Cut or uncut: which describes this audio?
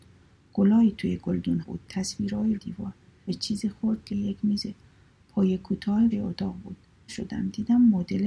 cut